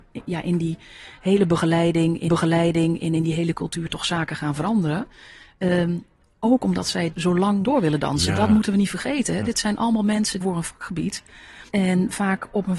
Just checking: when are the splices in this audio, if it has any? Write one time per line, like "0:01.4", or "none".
0:02.3
0:07.1
0:07.6
0:10.4
0:11.7